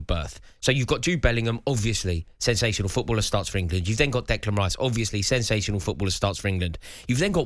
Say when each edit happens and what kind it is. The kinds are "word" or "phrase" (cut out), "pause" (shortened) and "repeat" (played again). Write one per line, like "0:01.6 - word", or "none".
none